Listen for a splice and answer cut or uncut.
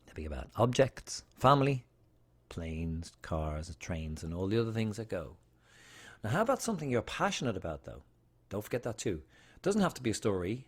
uncut